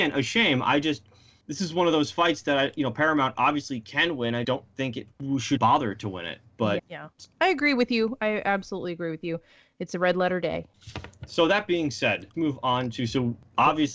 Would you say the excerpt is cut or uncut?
cut